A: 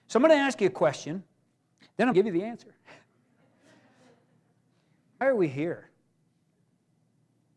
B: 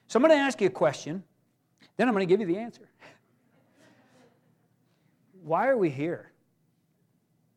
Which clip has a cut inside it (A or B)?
A